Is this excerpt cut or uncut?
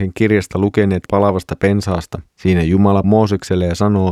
cut